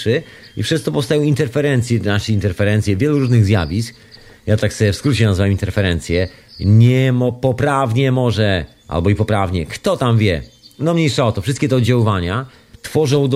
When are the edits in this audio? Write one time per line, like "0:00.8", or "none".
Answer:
none

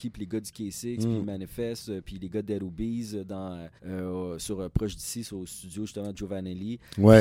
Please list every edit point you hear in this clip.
0:03.8

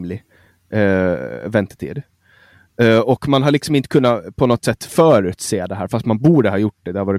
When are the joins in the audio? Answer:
none

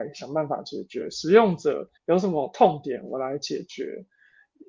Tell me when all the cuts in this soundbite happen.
0:02.0

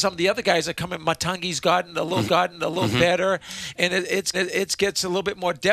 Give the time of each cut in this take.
0:02.3
0:04.3

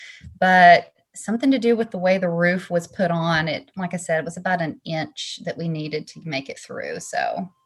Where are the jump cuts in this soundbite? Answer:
none

